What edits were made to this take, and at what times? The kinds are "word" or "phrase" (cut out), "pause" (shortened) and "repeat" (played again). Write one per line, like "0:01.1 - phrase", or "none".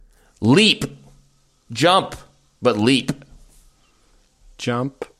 none